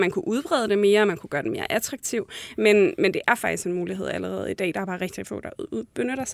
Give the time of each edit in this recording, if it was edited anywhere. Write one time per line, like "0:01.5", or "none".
none